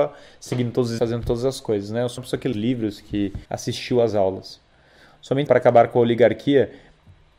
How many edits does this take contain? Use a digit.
5